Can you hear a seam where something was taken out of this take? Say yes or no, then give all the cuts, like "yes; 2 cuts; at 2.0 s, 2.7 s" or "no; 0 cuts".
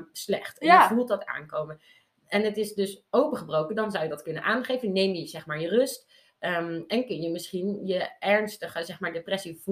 no; 0 cuts